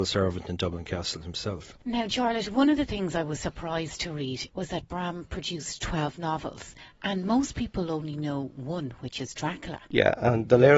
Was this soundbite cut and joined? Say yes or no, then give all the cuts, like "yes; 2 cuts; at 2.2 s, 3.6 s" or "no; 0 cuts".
no; 0 cuts